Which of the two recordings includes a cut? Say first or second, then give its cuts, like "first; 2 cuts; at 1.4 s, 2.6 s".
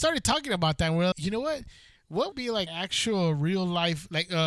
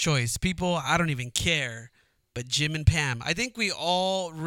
first; 3 cuts; at 1.1 s, 2.3 s, 2.7 s